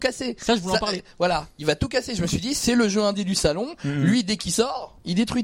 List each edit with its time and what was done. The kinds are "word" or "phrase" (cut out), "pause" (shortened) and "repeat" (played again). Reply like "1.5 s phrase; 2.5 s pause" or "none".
none